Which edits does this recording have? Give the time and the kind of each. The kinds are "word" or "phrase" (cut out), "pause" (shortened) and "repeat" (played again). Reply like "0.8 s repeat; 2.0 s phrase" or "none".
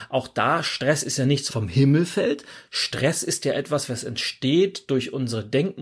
1.5 s word